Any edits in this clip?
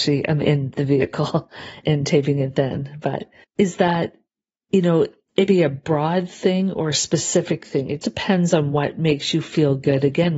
yes; 4 cuts; at 1.8 s, 3.4 s, 5.5 s, 8.0 s

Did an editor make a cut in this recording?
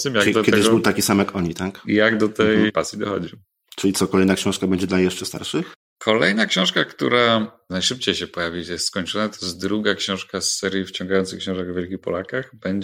no; 0 cuts

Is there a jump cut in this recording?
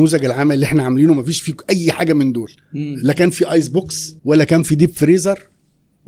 yes; 2 cuts; at 2.6 s, 4.2 s

